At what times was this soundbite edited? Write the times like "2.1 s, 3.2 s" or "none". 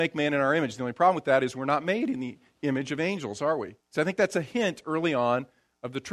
3.8 s